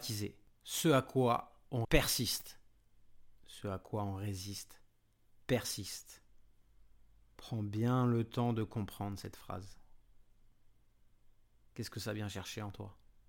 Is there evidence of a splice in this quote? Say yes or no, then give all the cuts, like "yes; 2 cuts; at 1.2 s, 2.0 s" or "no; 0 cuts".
yes; 2 cuts; at 1.8 s, 3.4 s